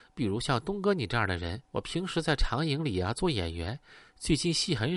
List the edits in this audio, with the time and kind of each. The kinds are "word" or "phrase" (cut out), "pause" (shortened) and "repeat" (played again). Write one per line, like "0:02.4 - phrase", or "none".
0:01.6 - pause